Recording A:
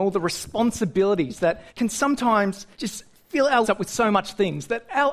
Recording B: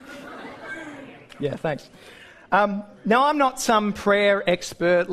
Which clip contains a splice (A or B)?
A